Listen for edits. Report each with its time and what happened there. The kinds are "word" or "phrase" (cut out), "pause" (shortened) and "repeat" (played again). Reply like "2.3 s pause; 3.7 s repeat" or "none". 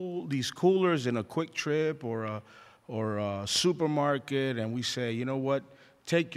none

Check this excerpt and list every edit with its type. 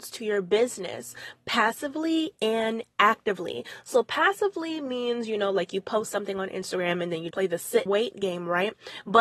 7.3 s word; 7.9 s word

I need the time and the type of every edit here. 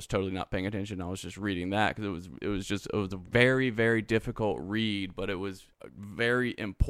5.7 s pause

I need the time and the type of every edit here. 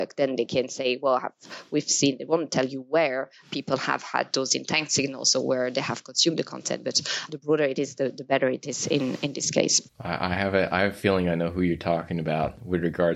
9.9 s pause

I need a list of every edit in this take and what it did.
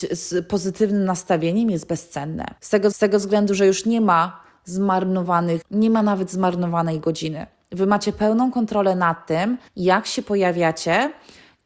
2.6 s pause; 2.9 s repeat; 5.6 s word; 9.7 s pause

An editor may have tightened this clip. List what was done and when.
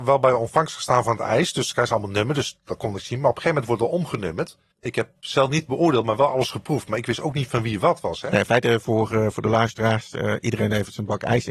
none

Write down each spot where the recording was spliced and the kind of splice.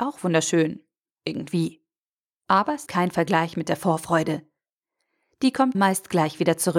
2.9 s word; 5.7 s phrase

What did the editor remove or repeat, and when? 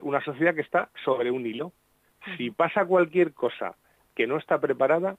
none

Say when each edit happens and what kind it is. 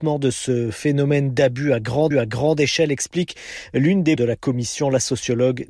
2.1 s repeat; 4.2 s word

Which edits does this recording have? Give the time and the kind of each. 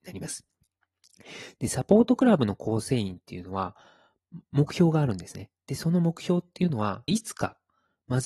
7.1 s phrase

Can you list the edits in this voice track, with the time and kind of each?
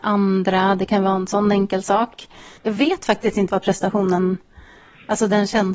2.6 s pause; 3.5 s word

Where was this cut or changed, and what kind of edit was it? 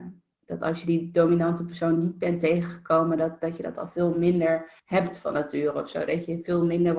4.8 s pause

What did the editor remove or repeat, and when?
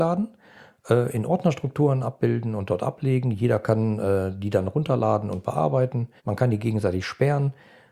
6.2 s pause

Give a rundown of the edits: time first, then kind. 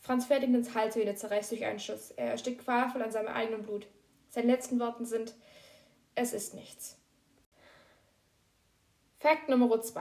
none

